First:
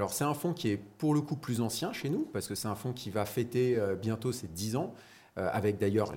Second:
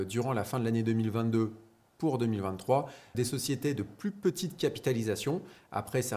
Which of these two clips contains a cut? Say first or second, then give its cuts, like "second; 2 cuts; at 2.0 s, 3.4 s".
second; 1 cut; at 3.1 s